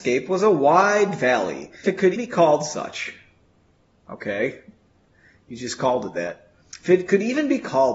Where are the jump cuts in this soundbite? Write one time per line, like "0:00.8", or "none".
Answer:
0:01.8
0:02.2